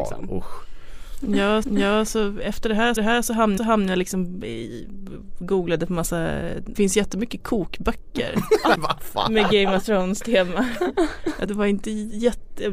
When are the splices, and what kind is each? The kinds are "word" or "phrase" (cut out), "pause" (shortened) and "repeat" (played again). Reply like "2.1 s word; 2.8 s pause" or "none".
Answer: 1.6 s repeat; 3.0 s repeat; 3.6 s repeat; 6.8 s word; 8.8 s word; 11.5 s phrase